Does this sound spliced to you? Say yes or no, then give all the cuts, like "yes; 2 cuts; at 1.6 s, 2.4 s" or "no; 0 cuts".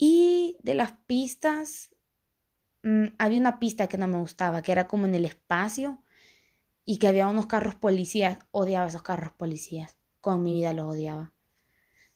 no; 0 cuts